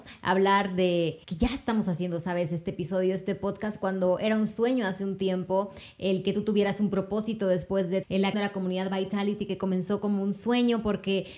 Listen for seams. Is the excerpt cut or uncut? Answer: cut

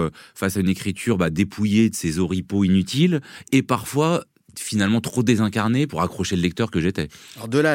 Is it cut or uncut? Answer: uncut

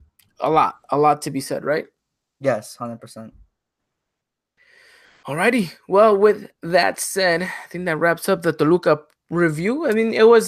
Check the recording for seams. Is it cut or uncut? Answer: uncut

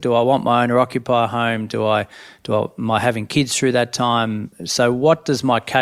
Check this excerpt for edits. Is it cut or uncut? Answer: uncut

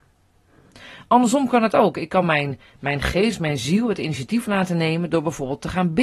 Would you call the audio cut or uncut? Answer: uncut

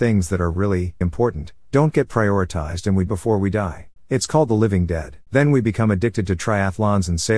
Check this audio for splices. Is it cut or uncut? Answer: cut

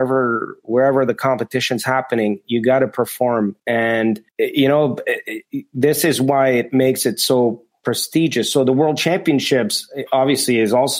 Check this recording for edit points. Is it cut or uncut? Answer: cut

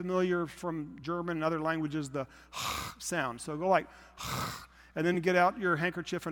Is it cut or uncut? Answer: uncut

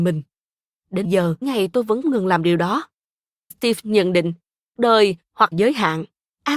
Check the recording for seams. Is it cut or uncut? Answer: cut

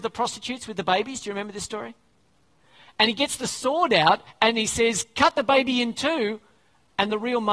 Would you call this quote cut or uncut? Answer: uncut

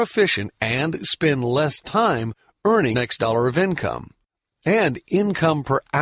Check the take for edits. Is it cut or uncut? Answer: cut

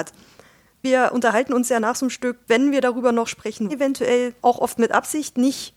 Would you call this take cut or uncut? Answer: cut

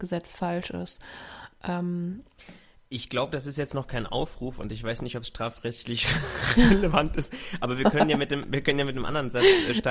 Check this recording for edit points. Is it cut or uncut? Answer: uncut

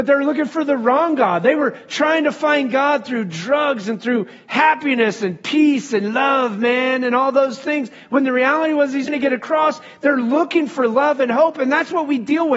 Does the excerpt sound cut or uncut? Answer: cut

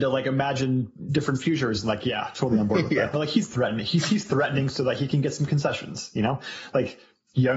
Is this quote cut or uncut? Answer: uncut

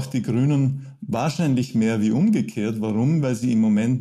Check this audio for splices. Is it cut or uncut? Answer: uncut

